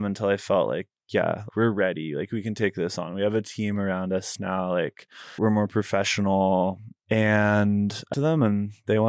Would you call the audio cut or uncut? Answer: cut